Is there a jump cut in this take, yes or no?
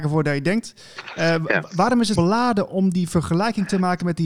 yes